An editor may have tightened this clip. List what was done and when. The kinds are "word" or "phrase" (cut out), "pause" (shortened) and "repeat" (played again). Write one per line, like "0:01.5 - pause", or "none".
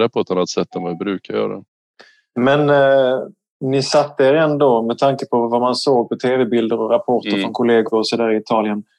none